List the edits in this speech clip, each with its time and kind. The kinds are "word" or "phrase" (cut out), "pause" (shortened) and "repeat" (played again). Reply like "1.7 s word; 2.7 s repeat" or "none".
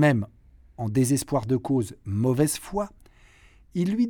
none